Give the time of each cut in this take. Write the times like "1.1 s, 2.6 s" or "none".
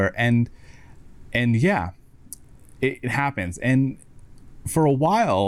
none